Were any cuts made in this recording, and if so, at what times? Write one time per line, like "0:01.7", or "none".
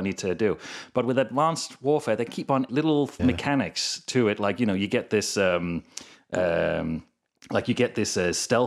0:02.3
0:02.7
0:03.2